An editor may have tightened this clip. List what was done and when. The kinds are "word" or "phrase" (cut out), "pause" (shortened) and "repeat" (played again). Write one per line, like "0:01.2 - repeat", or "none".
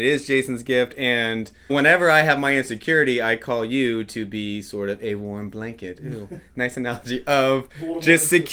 0:01.7 - word